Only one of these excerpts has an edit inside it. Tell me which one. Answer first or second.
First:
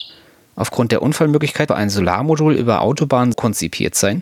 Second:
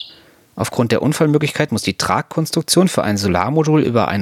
first